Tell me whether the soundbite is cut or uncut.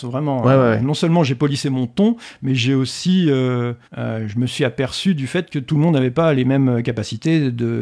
cut